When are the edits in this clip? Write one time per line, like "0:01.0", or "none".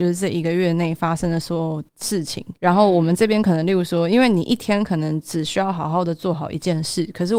0:02.6